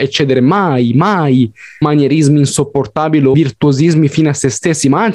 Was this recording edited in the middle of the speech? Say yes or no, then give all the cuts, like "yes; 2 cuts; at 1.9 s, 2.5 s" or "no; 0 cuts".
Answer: yes; 2 cuts; at 1.8 s, 3.3 s